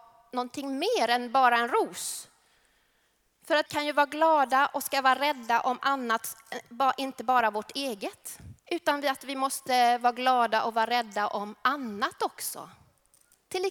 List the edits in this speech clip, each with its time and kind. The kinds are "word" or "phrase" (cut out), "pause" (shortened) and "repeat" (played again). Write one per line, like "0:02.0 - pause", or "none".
0:03.7 - word
0:08.6 - pause